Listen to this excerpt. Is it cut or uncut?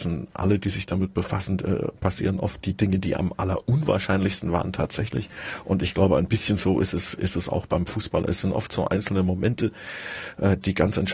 uncut